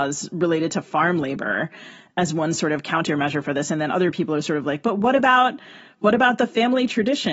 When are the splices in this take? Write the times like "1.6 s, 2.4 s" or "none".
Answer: none

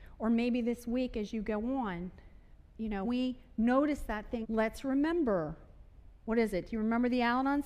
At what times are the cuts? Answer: 3.0 s, 4.4 s

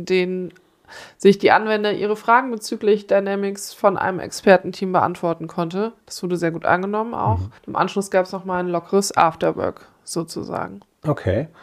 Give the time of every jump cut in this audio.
7.6 s

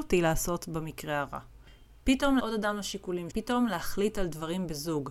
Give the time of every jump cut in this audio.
2.4 s, 3.3 s

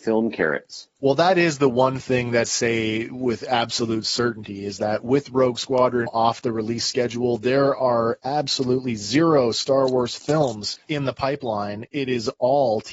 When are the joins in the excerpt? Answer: 1.0 s, 2.4 s, 6.1 s, 10.8 s

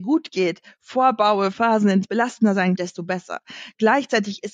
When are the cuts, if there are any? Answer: 1.5 s, 2.0 s, 2.8 s

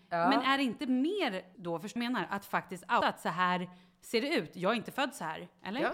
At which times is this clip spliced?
1.5 s, 2.0 s, 3.0 s

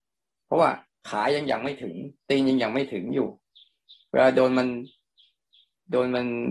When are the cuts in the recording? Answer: 2.2 s

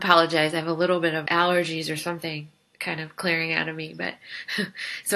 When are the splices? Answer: 1.3 s

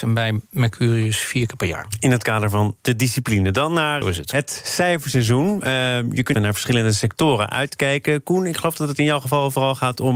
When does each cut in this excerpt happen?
4.0 s, 6.3 s

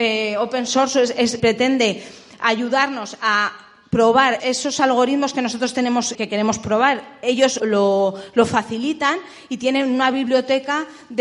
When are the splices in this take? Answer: 1.4 s, 4.4 s, 6.1 s, 7.6 s

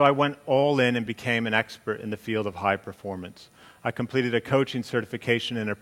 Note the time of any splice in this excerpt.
none

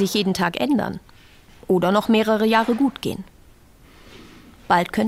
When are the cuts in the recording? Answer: none

